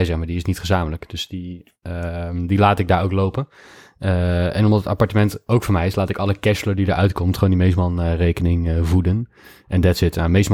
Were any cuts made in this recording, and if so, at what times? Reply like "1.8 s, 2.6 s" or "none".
none